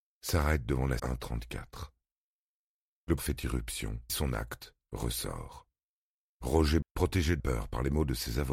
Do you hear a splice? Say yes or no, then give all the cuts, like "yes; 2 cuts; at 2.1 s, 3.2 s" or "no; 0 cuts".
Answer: yes; 5 cuts; at 1.0 s, 3.2 s, 4.1 s, 6.8 s, 7.4 s